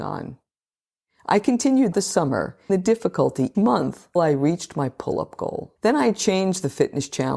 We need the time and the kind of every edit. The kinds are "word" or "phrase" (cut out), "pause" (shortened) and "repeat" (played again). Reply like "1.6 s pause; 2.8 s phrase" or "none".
1.9 s phrase; 2.7 s word; 3.5 s word; 4.2 s word; 5.8 s pause